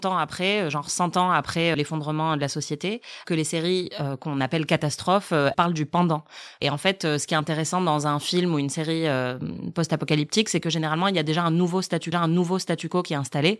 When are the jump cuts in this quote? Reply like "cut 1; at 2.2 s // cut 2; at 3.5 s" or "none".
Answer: cut 1; at 1.7 s // cut 2; at 3.2 s // cut 3; at 5.5 s // cut 4; at 12.1 s